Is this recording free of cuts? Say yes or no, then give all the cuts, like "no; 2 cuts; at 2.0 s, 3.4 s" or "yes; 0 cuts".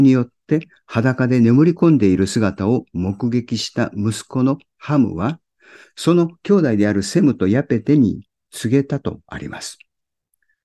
yes; 0 cuts